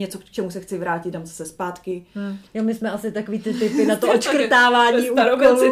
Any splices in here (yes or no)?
yes